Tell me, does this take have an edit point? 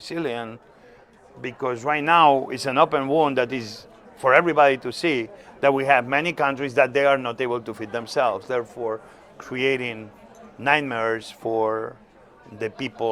no; 0 cuts

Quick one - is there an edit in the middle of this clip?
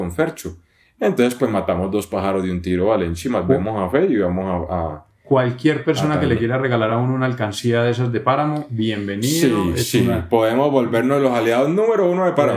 no; 0 cuts

